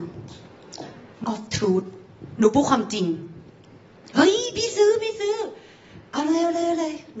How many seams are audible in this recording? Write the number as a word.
one